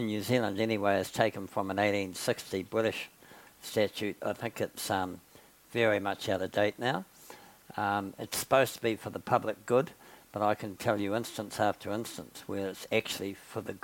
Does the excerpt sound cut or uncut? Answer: uncut